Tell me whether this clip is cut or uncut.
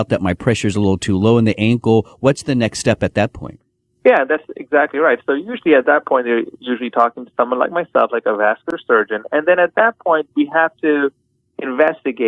uncut